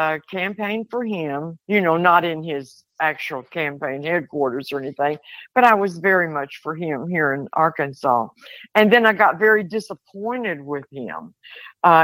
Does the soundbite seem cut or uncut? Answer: cut